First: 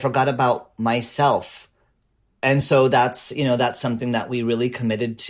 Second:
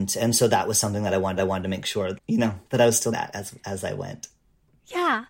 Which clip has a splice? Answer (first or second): second